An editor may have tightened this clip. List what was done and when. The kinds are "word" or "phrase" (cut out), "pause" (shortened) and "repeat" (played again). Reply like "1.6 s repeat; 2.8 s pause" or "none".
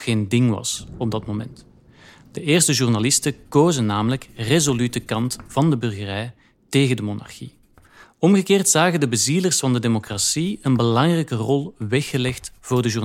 none